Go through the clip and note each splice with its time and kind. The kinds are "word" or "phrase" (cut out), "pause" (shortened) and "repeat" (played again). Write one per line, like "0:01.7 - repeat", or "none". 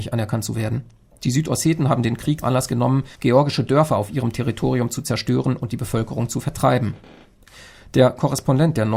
0:02.4 - word
0:03.1 - pause